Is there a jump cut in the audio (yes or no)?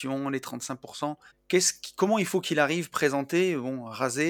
yes